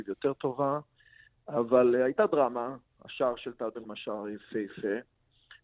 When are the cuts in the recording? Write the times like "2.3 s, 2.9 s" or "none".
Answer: 3.8 s